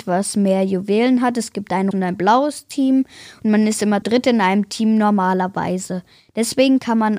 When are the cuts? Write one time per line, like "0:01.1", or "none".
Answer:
0:01.9
0:04.0